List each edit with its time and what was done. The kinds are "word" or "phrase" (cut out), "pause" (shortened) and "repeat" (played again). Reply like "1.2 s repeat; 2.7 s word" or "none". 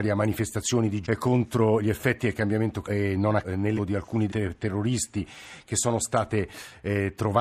1.0 s word; 2.8 s word; 3.4 s word; 3.8 s word; 4.3 s word